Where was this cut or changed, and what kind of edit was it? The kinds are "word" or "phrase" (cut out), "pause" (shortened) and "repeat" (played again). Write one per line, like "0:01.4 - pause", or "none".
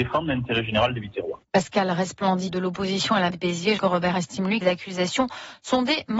0:02.5 - word
0:03.3 - word
0:03.8 - word
0:04.1 - word
0:04.6 - word